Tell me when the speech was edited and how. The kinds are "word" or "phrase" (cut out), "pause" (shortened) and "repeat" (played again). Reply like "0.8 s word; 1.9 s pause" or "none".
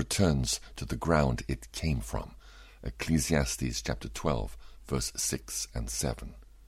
none